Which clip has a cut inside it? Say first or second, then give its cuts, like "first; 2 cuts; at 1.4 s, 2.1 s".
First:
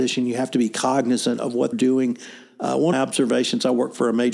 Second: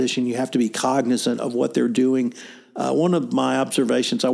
first; 2 cuts; at 1.7 s, 2.9 s